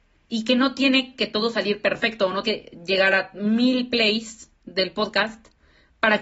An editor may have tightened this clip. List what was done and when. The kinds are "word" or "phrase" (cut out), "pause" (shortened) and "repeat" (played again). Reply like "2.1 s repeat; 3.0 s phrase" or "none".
2.4 s word